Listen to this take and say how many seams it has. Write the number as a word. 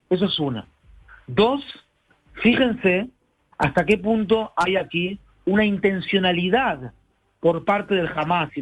zero